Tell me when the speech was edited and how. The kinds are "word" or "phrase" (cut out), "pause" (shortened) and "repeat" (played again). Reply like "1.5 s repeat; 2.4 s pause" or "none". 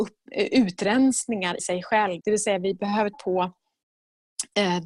1.6 s word; 2.2 s word; 3.1 s word